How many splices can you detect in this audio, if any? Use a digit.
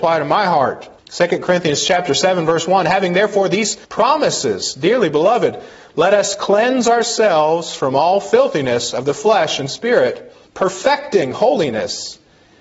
3